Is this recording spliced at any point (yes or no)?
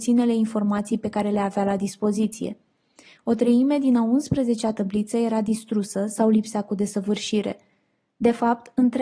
no